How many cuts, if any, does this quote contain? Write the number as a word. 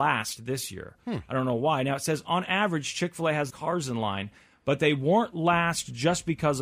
one